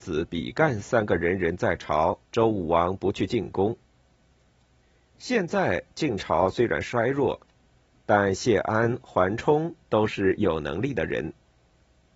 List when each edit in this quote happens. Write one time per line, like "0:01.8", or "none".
0:02.2